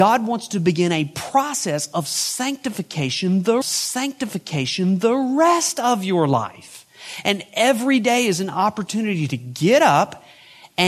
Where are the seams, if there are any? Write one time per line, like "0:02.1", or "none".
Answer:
0:03.6